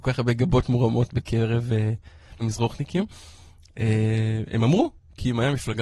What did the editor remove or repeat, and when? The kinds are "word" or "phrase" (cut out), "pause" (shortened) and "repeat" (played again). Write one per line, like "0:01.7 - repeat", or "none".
0:02.4 - word

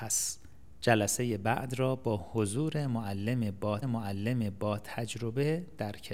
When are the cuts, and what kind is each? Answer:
0:03.8 - repeat

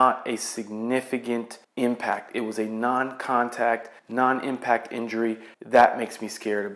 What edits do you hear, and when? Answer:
0:01.6 - pause
0:04.0 - pause
0:05.5 - pause

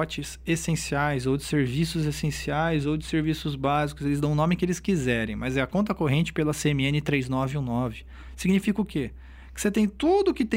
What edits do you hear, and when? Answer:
none

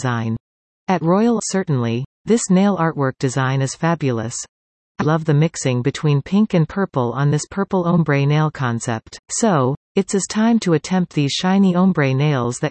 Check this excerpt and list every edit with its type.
0:01.4 - phrase
0:05.0 - word
0:09.2 - pause

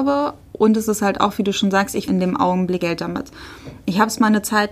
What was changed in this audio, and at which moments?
0:02.1 - word
0:02.8 - word

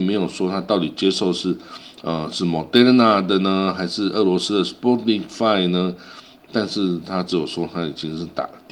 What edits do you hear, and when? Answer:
none

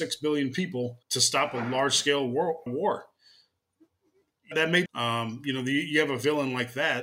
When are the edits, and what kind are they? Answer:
0:01.0 - pause
0:02.7 - word
0:04.5 - phrase
0:04.9 - phrase

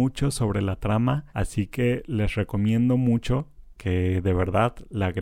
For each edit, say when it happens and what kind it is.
0:01.3 - pause

